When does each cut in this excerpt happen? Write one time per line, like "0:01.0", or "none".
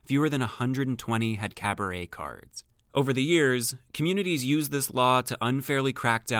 none

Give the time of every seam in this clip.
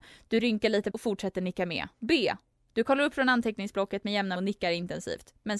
0:00.9
0:01.9
0:04.4

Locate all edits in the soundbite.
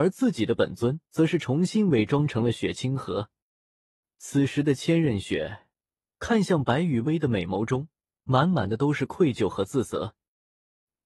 0:01.1

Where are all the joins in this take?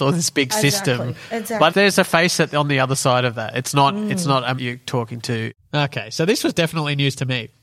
0:01.7
0:04.6

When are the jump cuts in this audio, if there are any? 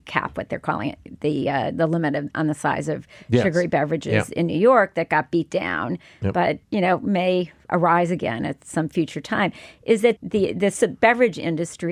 0:06.6
0:10.2

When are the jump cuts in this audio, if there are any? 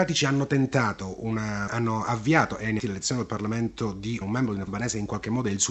0:01.7
0:02.8
0:04.2
0:04.7

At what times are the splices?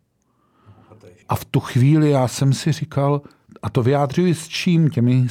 0:01.2
0:03.5

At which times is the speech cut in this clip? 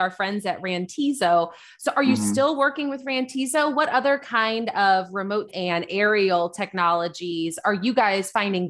0:05.5

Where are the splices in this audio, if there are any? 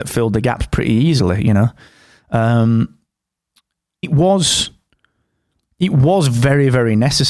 0:04.0

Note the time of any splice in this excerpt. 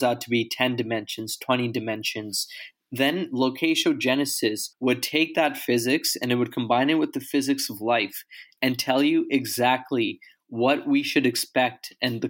0:04.7

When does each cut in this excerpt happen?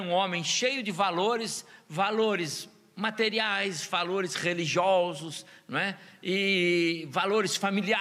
none

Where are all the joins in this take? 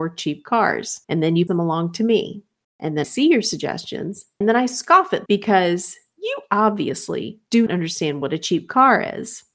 0:01.0
0:01.5
0:02.6
0:03.0
0:04.4
0:05.3
0:07.7

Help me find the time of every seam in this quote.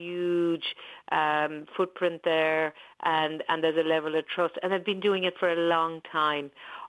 none

